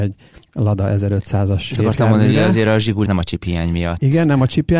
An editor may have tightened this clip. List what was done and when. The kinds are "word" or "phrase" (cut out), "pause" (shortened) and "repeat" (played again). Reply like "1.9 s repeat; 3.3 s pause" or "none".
1.8 s word; 3.1 s word